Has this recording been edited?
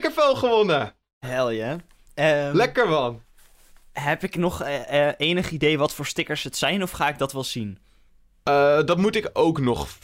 no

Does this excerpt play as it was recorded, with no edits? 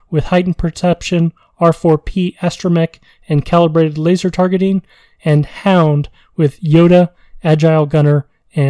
yes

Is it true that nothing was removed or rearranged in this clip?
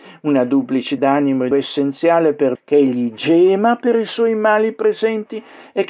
no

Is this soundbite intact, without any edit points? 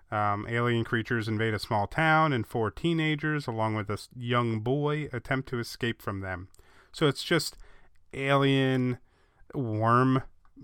yes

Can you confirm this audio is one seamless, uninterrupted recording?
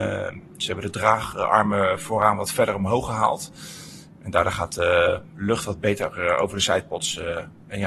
yes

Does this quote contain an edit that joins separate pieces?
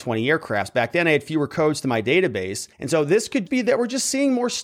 yes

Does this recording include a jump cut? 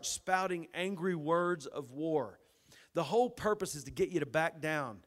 no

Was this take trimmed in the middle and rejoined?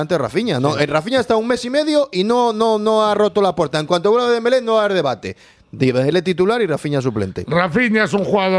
no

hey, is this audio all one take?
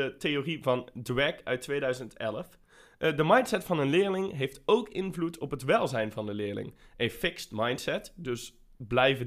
yes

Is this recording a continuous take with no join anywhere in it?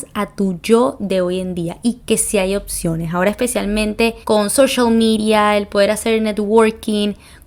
no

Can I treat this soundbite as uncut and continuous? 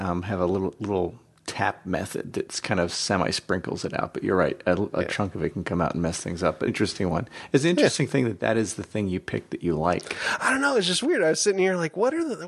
no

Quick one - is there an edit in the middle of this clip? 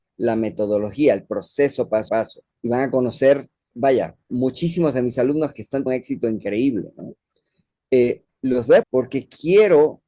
yes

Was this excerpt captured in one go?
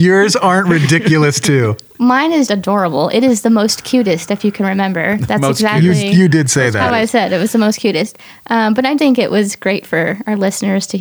no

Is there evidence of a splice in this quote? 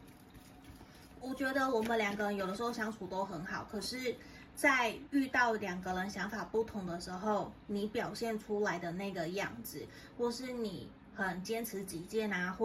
no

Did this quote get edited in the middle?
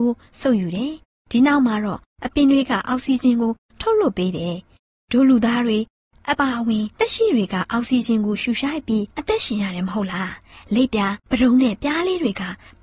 yes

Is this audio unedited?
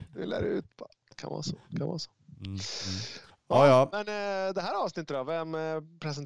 no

